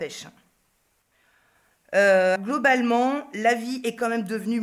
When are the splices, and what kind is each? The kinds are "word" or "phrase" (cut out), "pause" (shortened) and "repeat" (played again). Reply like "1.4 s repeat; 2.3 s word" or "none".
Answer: 2.4 s word